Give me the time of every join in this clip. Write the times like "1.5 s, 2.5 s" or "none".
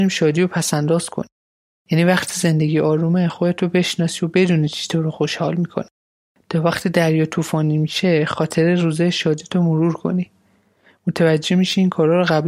none